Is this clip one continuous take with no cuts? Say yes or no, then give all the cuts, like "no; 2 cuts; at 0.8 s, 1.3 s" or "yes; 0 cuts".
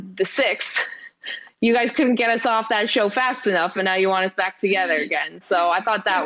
yes; 0 cuts